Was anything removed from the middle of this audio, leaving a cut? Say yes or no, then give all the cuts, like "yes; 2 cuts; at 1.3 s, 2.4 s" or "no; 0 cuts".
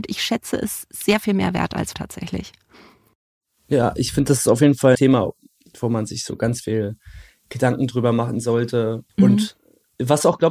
yes; 3 cuts; at 1.9 s, 4.9 s, 9.1 s